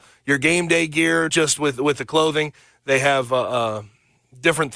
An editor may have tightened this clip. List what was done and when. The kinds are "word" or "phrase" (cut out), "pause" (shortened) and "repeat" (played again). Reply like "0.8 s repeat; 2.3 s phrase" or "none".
1.3 s word